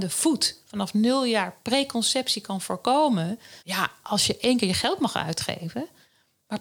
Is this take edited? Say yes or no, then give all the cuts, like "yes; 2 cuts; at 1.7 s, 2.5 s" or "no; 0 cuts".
yes; 1 cut; at 3.6 s